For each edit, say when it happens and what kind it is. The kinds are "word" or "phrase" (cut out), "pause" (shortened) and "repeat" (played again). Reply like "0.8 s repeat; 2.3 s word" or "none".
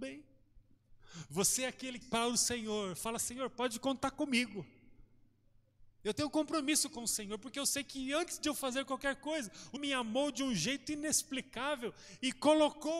2.0 s phrase; 9.8 s word